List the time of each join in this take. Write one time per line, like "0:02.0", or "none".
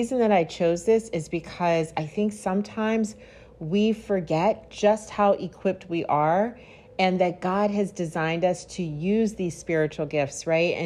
none